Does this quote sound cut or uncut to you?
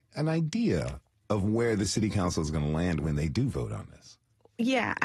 uncut